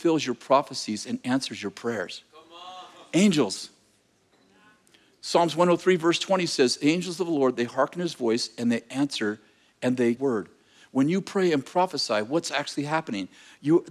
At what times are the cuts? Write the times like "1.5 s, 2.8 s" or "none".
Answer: 10.2 s